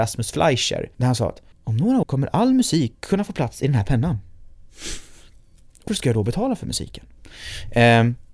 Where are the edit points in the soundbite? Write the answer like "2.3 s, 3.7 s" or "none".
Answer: 0.9 s, 1.5 s, 2.0 s, 5.9 s